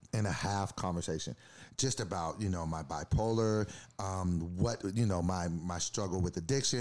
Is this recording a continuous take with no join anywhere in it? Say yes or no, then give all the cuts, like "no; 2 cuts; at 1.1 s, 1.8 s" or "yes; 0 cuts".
yes; 0 cuts